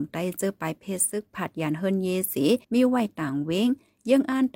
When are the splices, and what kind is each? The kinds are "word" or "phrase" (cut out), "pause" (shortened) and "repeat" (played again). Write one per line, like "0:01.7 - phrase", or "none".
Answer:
0:02.6 - pause